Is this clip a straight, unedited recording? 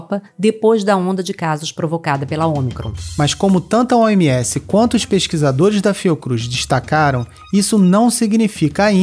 yes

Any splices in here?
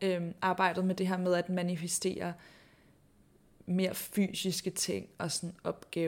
no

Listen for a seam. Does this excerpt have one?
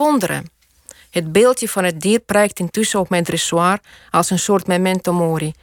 no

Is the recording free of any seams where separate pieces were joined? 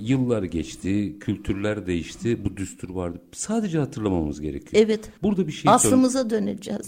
yes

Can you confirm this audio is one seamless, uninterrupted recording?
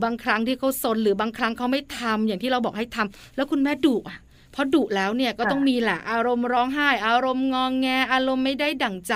yes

